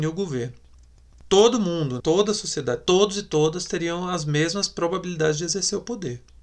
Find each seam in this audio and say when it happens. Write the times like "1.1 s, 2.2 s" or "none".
2.0 s